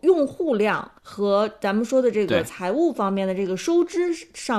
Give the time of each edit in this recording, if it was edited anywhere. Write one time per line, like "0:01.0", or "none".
0:01.0